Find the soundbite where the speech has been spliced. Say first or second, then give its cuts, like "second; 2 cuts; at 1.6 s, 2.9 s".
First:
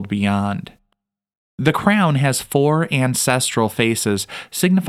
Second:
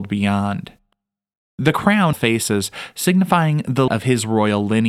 second; 2 cuts; at 2.1 s, 3.9 s